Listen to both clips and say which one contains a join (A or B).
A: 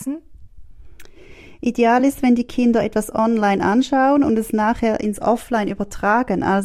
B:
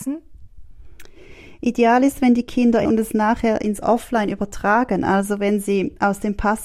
B